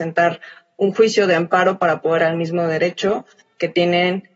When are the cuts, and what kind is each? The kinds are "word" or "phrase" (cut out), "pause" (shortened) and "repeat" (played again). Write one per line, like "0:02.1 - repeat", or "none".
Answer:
0:02.2 - word